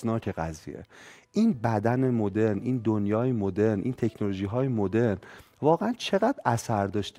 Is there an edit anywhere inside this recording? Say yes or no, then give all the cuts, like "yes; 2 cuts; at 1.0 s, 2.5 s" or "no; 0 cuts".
no; 0 cuts